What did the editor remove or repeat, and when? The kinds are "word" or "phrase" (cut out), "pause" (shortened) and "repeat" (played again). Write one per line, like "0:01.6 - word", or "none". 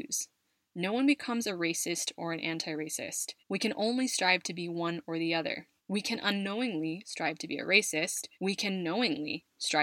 0:03.4 - pause
0:05.8 - pause
0:08.3 - pause